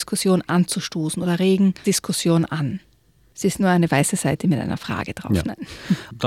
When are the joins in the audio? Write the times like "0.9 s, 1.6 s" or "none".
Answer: 1.8 s, 3.6 s